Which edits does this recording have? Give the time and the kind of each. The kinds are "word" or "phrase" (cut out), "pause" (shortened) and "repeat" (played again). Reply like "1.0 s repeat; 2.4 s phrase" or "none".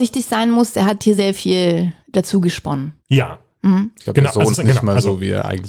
1.2 s word; 2.0 s pause; 3.0 s pause; 4.5 s word

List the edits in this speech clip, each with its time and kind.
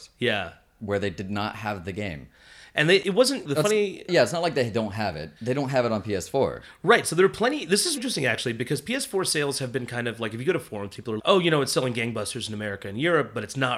5.4 s pause; 8.0 s word; 11.2 s word

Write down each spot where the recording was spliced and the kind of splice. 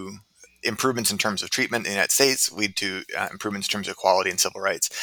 none

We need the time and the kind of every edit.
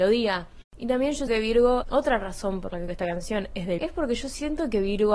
1.3 s word; 1.8 s word; 2.9 s word; 3.8 s word

